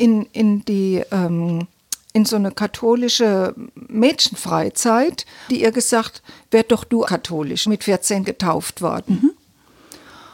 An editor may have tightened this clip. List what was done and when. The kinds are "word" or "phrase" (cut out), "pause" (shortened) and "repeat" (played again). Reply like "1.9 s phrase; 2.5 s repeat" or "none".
5.5 s word; 7.0 s word; 7.7 s phrase